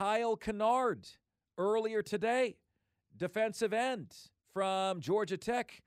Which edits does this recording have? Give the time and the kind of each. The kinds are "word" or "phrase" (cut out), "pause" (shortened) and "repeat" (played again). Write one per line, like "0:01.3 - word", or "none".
none